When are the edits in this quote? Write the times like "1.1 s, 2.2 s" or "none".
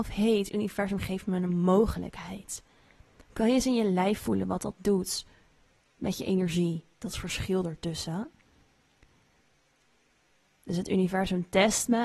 none